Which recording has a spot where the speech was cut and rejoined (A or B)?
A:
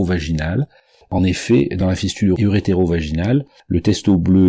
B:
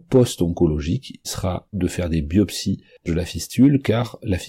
B